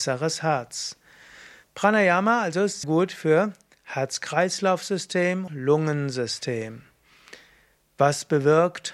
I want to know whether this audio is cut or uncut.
cut